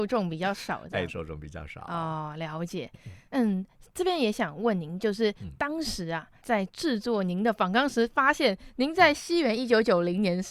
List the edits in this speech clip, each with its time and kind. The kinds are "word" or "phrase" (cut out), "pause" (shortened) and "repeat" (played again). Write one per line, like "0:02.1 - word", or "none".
0:01.1 - word
0:03.3 - pause
0:06.4 - pause